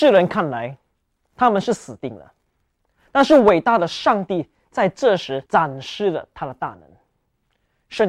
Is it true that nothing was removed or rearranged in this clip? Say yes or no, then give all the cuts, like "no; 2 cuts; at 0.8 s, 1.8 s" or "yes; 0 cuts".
no; 1 cut; at 5.5 s